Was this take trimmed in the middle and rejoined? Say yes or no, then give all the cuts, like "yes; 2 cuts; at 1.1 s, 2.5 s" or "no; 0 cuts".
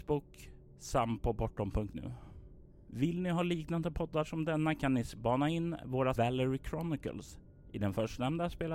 yes; 1 cut; at 6.1 s